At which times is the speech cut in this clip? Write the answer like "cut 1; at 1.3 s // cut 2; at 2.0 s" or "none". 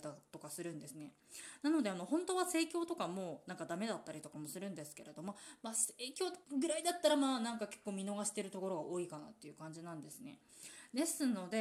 cut 1; at 6.4 s